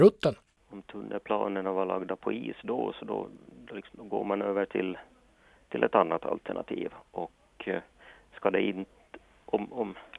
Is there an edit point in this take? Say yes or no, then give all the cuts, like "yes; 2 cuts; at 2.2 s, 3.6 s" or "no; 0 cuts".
no; 0 cuts